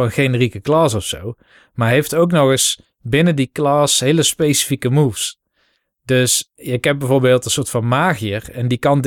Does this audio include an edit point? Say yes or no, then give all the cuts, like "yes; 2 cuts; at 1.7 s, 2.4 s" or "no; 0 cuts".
no; 0 cuts